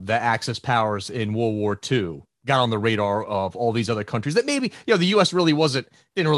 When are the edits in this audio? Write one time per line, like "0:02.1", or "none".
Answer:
none